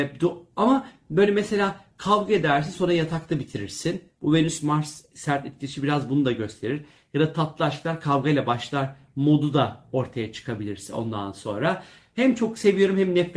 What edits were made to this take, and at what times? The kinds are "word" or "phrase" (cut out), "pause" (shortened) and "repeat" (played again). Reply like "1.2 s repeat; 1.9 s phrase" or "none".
none